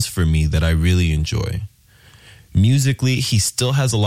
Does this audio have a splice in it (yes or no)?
no